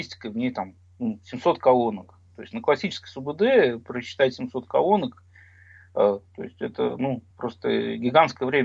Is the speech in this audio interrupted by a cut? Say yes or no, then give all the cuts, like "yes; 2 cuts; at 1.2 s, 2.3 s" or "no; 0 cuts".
no; 0 cuts